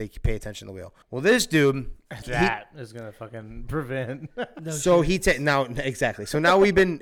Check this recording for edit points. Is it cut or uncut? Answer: cut